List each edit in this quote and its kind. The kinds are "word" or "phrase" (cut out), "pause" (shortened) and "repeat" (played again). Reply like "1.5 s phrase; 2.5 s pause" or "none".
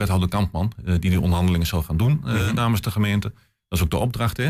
none